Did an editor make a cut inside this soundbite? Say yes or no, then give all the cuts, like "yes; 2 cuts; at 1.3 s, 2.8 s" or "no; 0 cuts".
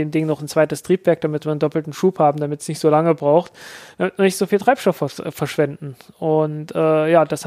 no; 0 cuts